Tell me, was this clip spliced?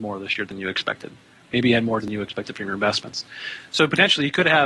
yes; 1 cut; at 2.0 s

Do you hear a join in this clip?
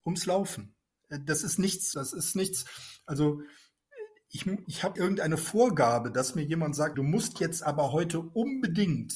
yes; 4 cuts; at 1.9 s, 4.6 s, 5.0 s, 6.9 s

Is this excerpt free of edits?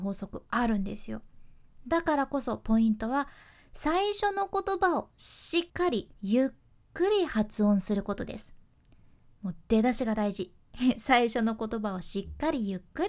no; 2 cuts; at 5.7 s, 6.1 s

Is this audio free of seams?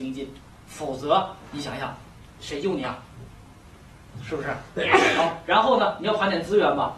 no; 1 cut; at 2.3 s

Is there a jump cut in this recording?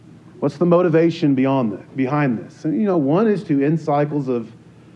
no; 0 cuts

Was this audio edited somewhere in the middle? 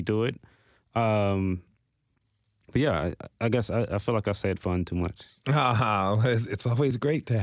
no; 0 cuts

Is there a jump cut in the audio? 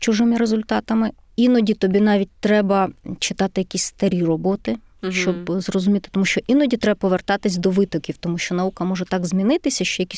no; 0 cuts

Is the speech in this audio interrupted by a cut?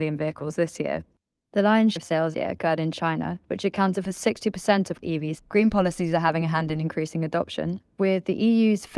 yes; 4 cuts; at 2.0 s, 2.3 s, 5.0 s, 5.4 s

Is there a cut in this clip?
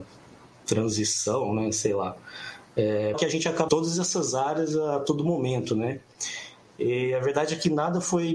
yes; 2 cuts; at 3.1 s, 3.7 s

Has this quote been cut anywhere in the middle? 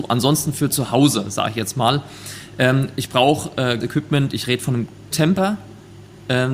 yes; 2 cuts; at 3.8 s, 5.1 s

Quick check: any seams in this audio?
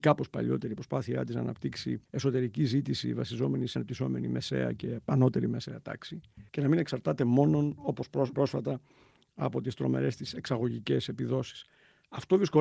yes; 4 cuts; at 2.0 s, 3.8 s, 6.5 s, 8.3 s

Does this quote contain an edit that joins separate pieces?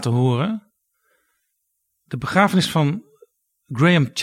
no; 0 cuts

